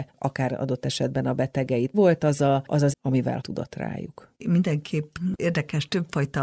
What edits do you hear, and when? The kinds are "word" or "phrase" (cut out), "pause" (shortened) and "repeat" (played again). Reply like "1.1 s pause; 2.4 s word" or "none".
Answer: 1.9 s word; 2.9 s word; 3.4 s word; 4.3 s pause